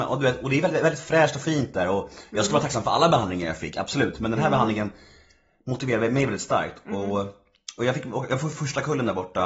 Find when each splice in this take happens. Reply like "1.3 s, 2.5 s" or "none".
none